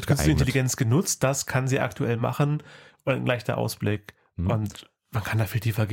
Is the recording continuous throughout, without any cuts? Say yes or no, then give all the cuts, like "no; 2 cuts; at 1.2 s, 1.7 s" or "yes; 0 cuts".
yes; 0 cuts